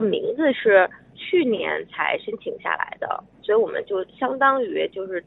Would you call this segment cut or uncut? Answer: cut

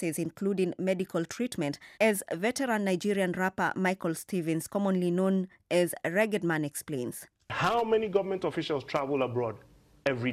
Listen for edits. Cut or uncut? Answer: cut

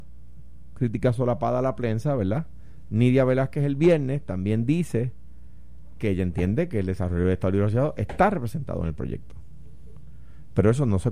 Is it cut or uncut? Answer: uncut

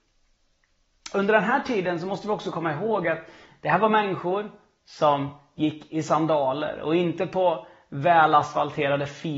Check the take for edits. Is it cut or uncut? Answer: uncut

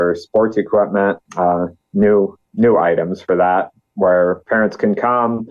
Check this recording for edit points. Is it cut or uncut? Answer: cut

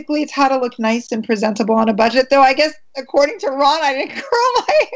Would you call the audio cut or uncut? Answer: uncut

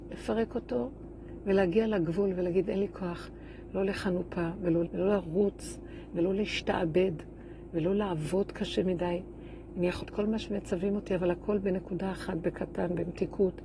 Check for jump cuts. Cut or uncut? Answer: cut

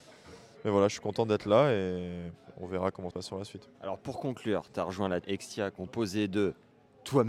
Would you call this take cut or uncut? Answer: cut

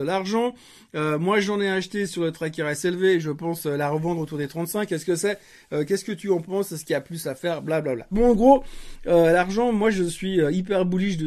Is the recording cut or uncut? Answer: uncut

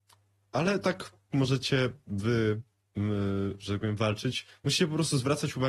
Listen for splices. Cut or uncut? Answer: cut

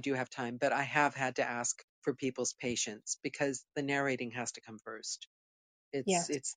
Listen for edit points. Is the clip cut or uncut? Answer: cut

